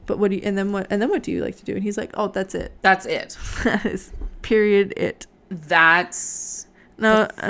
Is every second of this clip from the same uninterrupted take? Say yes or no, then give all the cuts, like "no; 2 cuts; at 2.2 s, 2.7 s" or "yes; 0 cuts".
no; 1 cut; at 2.8 s